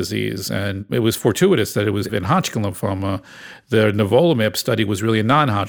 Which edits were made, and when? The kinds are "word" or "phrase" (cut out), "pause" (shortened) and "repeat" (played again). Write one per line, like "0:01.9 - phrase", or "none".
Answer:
0:02.1 - word